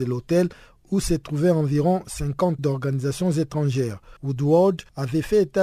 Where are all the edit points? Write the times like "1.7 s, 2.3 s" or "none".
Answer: 2.6 s, 4.2 s